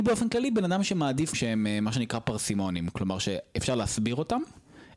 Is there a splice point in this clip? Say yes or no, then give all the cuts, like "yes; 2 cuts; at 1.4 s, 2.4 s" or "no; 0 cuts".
yes; 1 cut; at 1.3 s